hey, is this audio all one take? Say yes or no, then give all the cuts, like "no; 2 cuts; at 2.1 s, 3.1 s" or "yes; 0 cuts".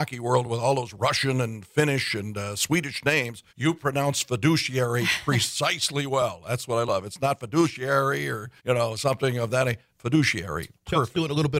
no; 2 cuts; at 3.5 s, 8.6 s